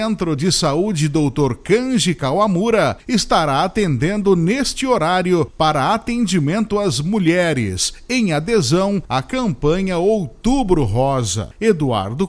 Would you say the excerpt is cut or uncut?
uncut